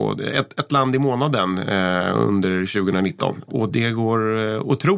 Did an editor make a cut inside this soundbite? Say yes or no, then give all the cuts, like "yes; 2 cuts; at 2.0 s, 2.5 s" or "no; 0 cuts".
no; 0 cuts